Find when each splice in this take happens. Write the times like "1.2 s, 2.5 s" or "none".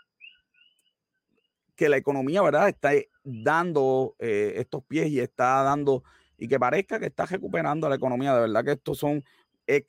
none

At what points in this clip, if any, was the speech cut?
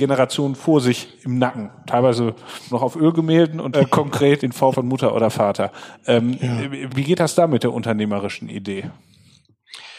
2.7 s, 3.7 s, 4.4 s, 4.7 s, 6.9 s

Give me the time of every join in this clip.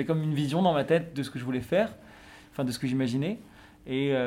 none

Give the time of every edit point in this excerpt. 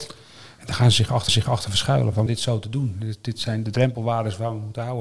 1.3 s, 2.3 s, 3.6 s

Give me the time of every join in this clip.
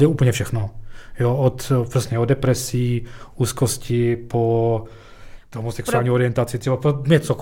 none

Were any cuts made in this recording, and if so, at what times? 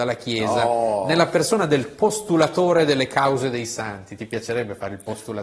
none

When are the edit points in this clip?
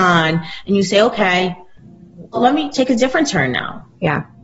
2.3 s, 2.7 s

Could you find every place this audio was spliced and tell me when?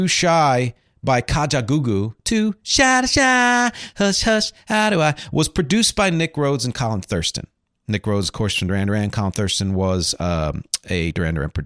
none

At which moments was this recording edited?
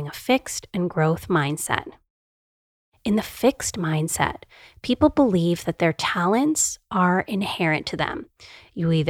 none

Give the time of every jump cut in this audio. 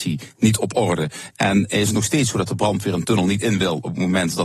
none

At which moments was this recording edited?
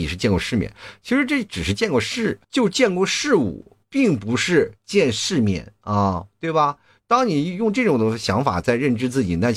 2.4 s

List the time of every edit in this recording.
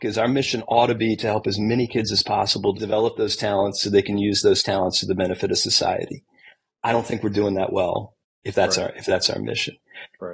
2.7 s

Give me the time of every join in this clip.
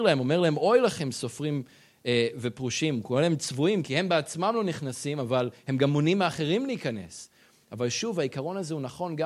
none

